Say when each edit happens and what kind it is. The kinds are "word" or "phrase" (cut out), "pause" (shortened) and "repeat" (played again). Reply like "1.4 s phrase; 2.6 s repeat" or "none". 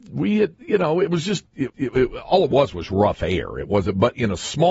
1.7 s repeat